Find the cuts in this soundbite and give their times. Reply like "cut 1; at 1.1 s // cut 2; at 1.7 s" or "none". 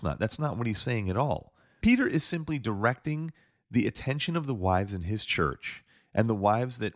none